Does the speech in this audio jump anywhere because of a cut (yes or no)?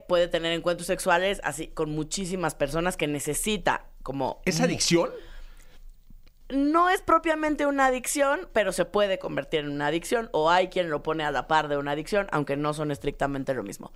no